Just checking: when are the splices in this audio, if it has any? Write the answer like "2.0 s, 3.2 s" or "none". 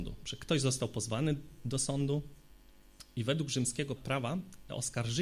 4.0 s